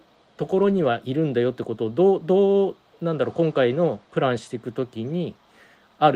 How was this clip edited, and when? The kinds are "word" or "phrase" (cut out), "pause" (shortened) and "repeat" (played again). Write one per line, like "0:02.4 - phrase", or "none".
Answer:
0:04.0 - pause